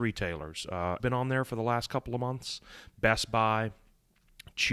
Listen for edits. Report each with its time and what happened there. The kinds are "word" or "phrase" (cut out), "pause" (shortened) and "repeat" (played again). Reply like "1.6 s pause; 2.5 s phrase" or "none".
1.0 s word